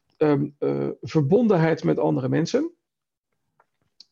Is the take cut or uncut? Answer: uncut